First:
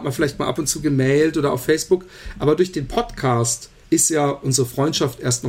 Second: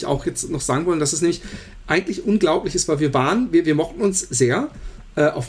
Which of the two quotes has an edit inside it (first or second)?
first